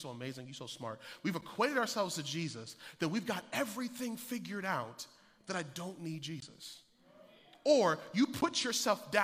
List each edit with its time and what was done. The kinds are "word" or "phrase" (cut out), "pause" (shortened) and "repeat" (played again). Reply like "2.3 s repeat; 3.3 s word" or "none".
none